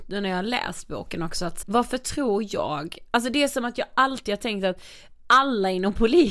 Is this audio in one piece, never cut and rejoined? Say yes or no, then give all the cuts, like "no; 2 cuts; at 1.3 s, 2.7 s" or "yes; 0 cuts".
no; 1 cut; at 1.6 s